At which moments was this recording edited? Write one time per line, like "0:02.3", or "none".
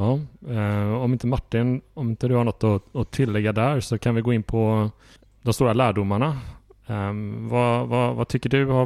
0:05.2